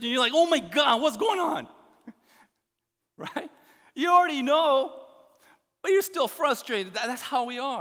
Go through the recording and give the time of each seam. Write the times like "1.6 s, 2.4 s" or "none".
none